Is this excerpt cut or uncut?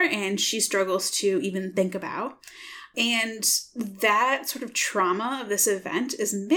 uncut